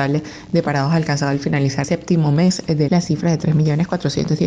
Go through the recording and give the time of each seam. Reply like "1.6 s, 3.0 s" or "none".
1.8 s, 2.9 s